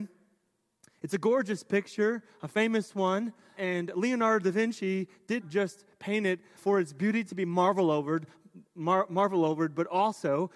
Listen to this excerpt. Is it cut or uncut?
cut